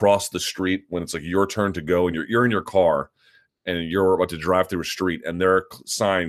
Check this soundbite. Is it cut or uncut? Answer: uncut